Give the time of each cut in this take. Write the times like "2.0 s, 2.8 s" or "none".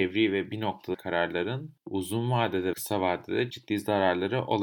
0.9 s, 2.7 s, 3.5 s